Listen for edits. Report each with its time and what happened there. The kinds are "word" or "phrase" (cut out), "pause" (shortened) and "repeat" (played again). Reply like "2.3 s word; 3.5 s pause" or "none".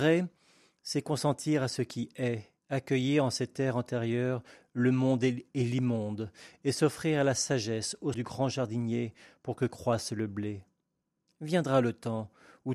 2.6 s pause; 8.1 s phrase